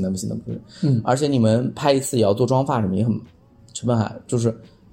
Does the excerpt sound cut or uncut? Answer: uncut